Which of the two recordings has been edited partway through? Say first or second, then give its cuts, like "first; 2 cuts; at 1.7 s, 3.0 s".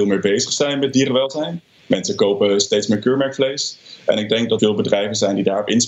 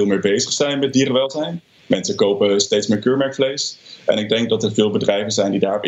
first; 1 cut; at 4.6 s